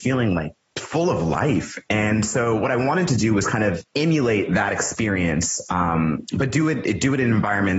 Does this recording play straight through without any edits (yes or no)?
no